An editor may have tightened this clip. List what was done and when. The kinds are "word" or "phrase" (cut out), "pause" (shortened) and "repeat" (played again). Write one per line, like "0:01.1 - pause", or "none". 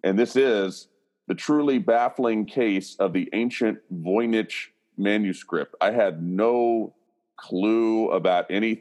none